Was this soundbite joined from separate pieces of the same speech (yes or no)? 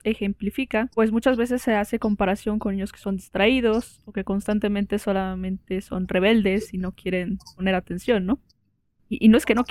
no